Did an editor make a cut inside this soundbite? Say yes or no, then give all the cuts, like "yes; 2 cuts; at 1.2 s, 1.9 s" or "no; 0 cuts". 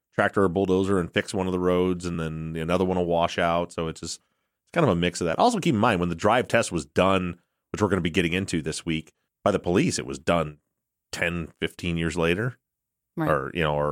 no; 0 cuts